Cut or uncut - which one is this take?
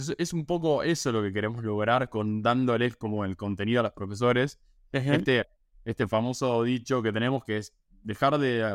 uncut